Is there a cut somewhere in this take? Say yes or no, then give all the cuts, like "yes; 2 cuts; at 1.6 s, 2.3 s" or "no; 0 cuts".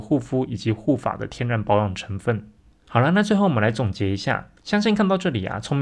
no; 0 cuts